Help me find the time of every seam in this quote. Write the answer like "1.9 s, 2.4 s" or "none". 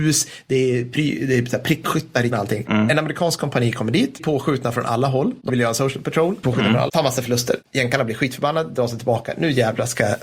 2.3 s, 4.2 s, 5.5 s, 6.4 s, 6.9 s